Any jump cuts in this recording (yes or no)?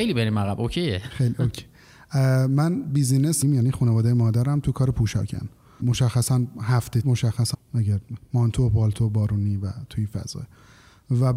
yes